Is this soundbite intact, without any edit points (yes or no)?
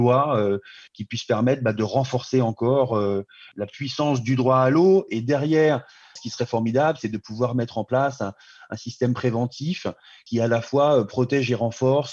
yes